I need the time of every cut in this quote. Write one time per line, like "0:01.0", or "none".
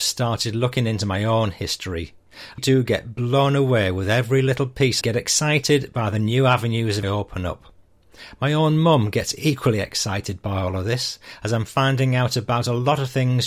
0:02.6
0:05.0
0:07.0